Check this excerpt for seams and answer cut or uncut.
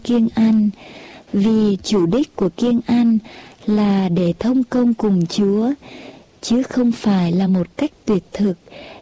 uncut